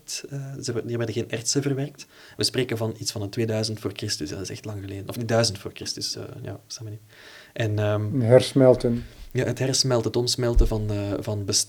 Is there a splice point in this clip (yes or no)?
no